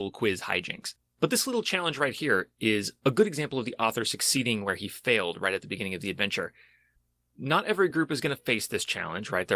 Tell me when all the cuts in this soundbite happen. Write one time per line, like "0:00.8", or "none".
none